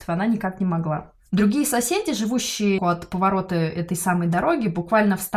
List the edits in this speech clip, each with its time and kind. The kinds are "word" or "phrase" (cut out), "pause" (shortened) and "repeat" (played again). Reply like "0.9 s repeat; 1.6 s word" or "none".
2.8 s word